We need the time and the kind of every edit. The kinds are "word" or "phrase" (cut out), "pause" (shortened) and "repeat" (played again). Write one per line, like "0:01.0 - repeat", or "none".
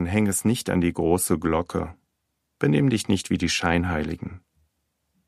none